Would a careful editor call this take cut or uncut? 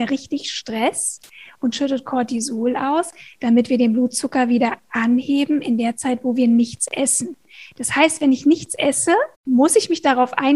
cut